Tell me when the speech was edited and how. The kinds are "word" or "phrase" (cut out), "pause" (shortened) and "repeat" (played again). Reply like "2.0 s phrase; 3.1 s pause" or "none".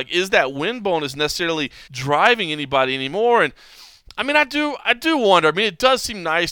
1.9 s pause